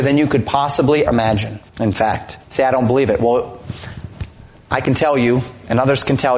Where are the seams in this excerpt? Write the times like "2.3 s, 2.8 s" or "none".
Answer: 1.1 s, 1.7 s, 2.4 s